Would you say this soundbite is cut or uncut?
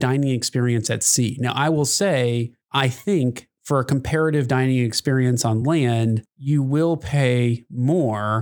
uncut